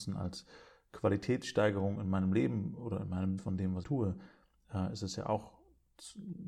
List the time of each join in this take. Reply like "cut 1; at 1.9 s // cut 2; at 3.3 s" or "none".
cut 1; at 3.4 s // cut 2; at 3.8 s